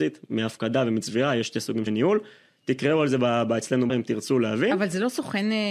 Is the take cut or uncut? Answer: cut